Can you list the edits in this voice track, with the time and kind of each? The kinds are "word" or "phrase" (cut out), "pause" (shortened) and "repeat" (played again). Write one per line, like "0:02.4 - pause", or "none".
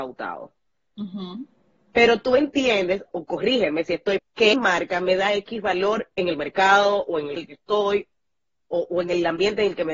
0:03.1 - word
0:04.2 - word
0:04.5 - word
0:07.4 - word